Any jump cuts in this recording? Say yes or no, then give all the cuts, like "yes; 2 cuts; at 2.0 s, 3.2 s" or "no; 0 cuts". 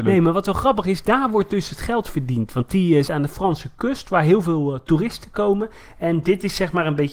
yes; 1 cut; at 3.0 s